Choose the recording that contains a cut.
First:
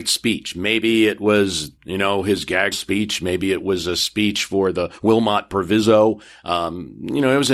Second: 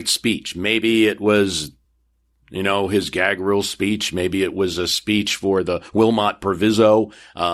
first; 2 cuts; at 1.8 s, 2.7 s

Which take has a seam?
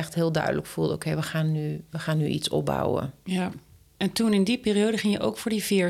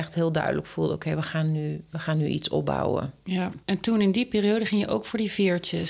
second; 1 cut; at 3.6 s

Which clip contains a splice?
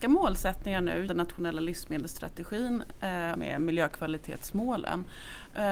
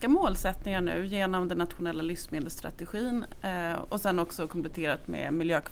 first; 2 cuts; at 1.1 s, 3.3 s

